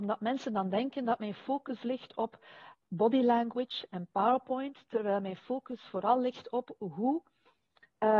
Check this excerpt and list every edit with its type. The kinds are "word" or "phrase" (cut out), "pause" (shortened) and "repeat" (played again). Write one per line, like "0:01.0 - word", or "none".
none